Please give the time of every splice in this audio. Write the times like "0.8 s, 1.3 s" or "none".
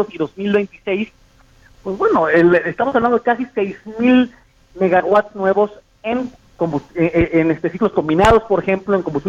none